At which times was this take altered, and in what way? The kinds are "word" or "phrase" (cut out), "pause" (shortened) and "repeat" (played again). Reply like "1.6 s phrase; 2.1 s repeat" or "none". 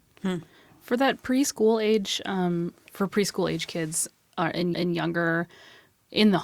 4.7 s repeat